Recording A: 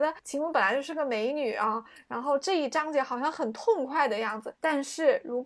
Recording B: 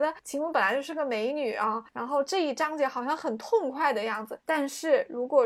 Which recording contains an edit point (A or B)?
B